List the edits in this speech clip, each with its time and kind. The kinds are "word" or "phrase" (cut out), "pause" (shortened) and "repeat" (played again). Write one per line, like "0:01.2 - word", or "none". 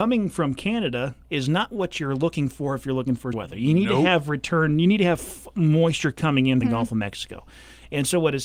0:03.3 - word
0:06.6 - word